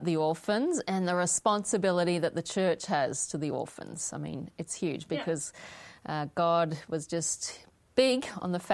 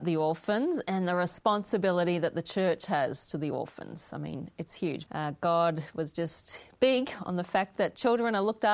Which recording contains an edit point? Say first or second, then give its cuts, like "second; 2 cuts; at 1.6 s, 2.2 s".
second; 2 cuts; at 5.1 s, 6.8 s